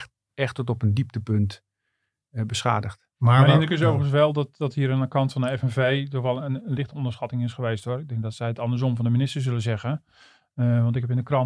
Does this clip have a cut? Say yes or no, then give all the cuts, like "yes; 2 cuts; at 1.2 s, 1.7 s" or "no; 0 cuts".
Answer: no; 0 cuts